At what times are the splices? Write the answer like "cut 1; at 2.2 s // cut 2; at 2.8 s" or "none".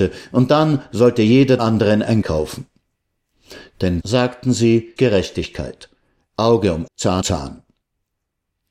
cut 1; at 1.6 s // cut 2; at 2.2 s // cut 3; at 4.0 s // cut 4; at 5.0 s // cut 5; at 6.9 s // cut 6; at 7.2 s